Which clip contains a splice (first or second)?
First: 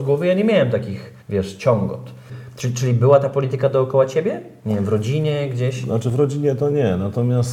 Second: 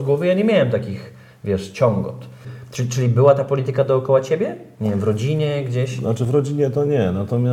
first